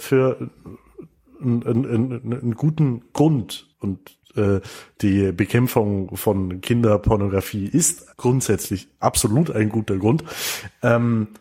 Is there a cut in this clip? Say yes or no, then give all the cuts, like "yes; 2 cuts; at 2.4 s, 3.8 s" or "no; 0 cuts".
yes; 2 cuts; at 3.7 s, 8.1 s